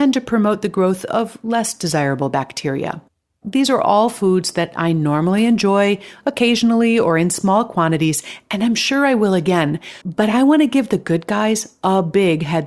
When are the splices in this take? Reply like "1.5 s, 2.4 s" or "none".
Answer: 3.2 s, 10.0 s